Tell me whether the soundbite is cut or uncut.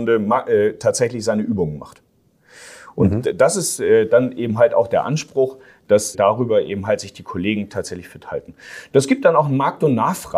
cut